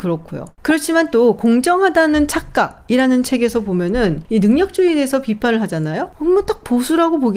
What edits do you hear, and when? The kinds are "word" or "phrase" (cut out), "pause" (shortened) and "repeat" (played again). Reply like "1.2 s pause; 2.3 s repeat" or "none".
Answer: none